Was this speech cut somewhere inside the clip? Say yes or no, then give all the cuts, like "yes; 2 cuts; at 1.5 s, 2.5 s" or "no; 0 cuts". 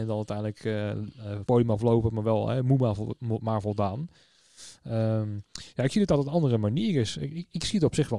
yes; 1 cut; at 1.5 s